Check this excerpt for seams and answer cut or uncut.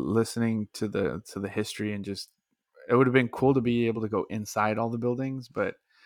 uncut